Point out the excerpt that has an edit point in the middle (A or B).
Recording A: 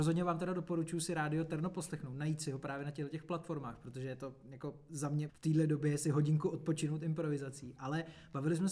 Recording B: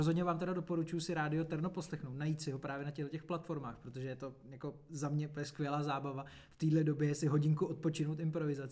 A